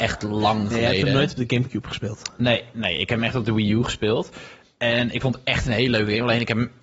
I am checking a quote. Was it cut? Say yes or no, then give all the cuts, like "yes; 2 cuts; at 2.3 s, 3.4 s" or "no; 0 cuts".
no; 0 cuts